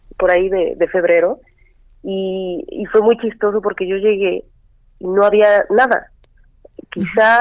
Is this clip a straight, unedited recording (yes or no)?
yes